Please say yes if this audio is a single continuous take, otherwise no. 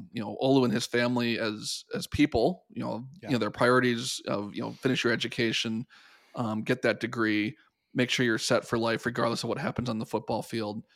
yes